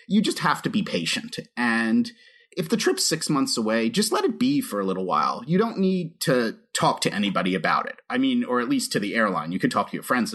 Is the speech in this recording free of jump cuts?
yes; 0 cuts

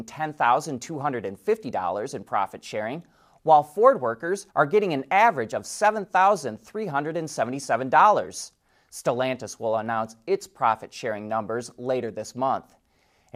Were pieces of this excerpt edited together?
yes; 1 cut; at 4.5 s

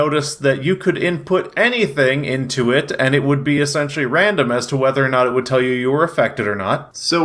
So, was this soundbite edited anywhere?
no; 0 cuts

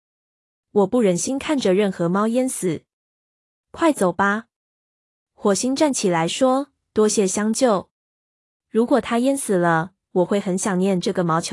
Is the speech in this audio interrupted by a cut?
no; 0 cuts

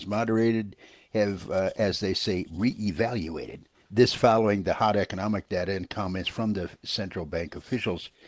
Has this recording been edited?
no; 0 cuts

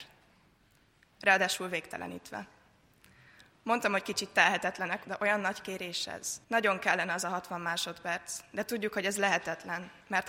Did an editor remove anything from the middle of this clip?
yes; 2 cuts; at 5.0 s, 6.4 s

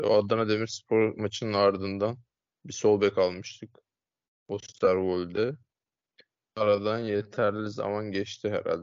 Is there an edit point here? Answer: no; 0 cuts

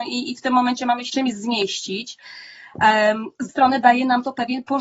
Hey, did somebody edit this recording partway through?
yes; 2 cuts; at 1.1 s, 3.5 s

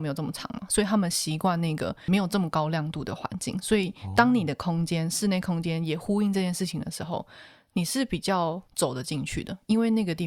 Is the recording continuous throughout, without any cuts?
no; 1 cut; at 8.7 s

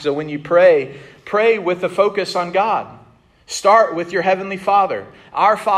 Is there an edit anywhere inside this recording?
no; 0 cuts

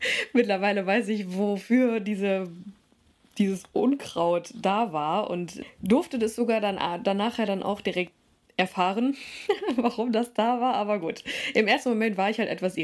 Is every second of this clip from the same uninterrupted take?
yes; 0 cuts

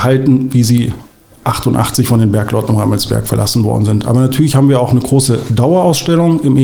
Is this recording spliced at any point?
no; 0 cuts

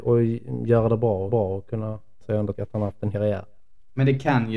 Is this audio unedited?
no; 4 cuts; at 1.3 s, 2.2 s, 2.5 s, 3.1 s

